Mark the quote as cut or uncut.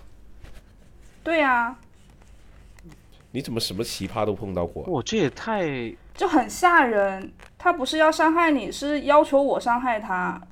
uncut